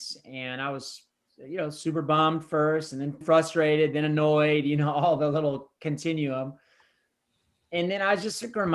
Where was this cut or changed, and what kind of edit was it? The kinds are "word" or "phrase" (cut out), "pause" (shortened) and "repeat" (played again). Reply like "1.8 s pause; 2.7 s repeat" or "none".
3.2 s word